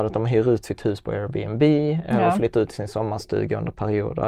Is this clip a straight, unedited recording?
yes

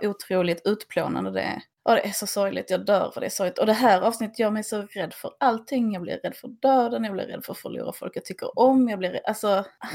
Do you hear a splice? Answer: no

